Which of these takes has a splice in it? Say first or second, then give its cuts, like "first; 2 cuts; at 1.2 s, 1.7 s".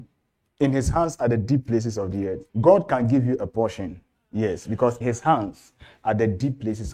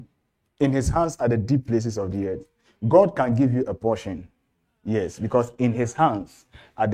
first; 3 cuts; at 2.5 s, 4.1 s, 5.0 s